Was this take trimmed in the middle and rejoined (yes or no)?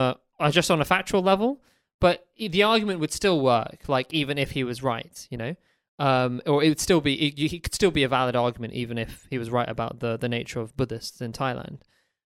no